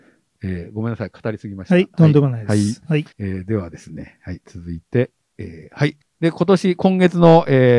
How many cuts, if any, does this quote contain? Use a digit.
2